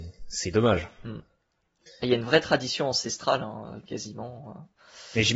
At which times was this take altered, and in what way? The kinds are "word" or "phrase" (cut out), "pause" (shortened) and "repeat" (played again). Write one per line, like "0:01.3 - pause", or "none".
none